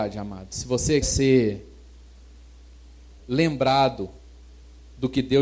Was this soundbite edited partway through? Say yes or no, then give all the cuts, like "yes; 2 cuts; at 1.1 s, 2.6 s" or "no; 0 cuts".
yes; 2 cuts; at 1.0 s, 3.2 s